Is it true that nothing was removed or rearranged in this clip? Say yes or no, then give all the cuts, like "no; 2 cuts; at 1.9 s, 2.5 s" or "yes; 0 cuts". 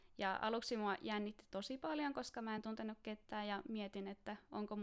yes; 0 cuts